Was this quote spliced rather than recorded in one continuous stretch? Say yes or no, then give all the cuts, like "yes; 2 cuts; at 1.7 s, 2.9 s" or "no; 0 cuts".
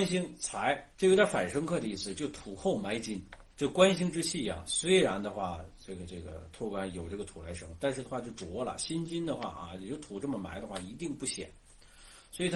yes; 2 cuts; at 0.9 s, 3.5 s